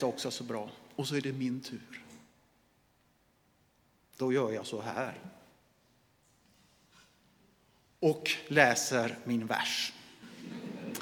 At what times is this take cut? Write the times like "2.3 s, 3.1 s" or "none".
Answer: none